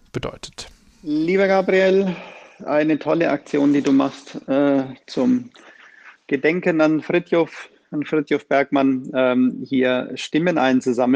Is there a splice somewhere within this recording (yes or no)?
no